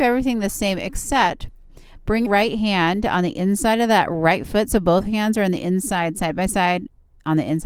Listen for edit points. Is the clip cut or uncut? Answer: cut